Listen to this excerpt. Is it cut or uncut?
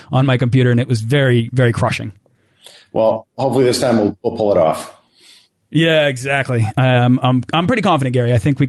uncut